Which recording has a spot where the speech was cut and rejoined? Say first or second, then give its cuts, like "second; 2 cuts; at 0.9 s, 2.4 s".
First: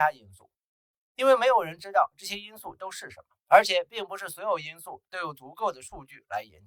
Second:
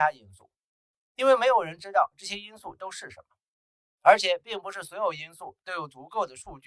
first; 1 cut; at 3.4 s